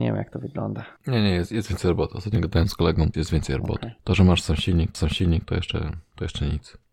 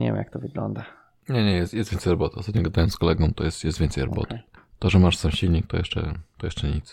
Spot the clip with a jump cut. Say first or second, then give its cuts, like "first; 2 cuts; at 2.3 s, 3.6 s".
first; 4 cuts; at 1.0 s, 3.1 s, 4.0 s, 4.9 s